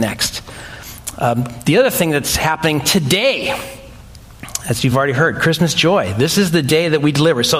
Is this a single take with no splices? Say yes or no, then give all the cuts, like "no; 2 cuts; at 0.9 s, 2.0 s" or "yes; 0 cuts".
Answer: yes; 0 cuts